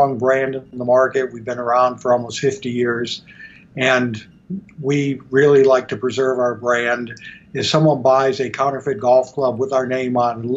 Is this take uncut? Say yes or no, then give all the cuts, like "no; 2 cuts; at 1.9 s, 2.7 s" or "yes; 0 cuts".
yes; 0 cuts